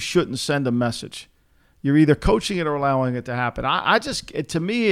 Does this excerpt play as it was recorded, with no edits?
yes; 0 cuts

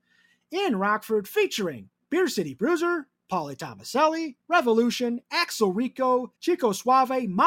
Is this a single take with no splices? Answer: no; 2 cuts; at 4.4 s, 6.4 s

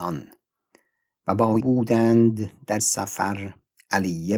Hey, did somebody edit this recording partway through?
yes; 2 cuts; at 1.6 s, 2.8 s

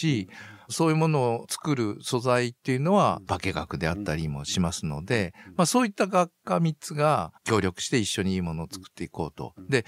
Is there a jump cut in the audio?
yes; 1 cut; at 7.4 s

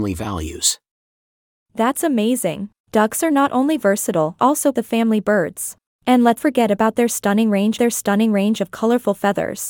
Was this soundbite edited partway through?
yes; 6 cuts; at 2.8 s, 4.4 s, 4.7 s, 5.9 s, 6.4 s, 7.8 s

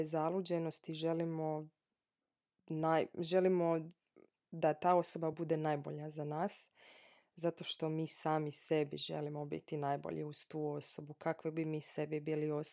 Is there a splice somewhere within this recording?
no; 0 cuts

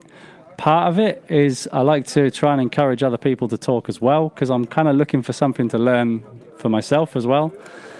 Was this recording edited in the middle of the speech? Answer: no; 0 cuts

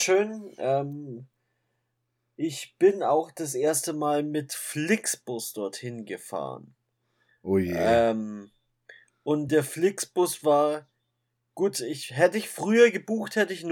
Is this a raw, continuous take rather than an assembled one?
yes; 0 cuts

